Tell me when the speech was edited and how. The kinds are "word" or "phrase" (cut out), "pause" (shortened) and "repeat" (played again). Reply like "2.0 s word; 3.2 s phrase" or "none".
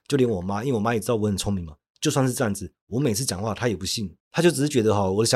4.2 s pause